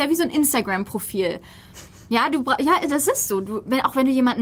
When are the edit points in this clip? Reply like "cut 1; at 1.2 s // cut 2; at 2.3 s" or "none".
none